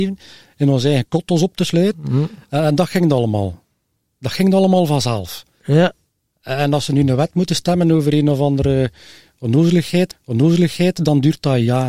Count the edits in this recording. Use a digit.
1